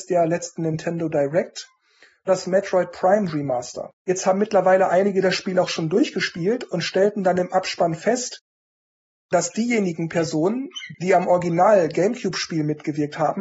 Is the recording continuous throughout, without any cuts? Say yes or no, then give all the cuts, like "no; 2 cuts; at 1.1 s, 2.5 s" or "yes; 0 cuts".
no; 1 cut; at 3.9 s